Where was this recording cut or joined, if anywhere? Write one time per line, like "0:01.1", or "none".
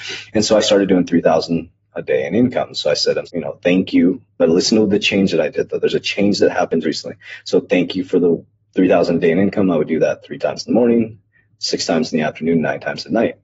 0:03.3
0:06.8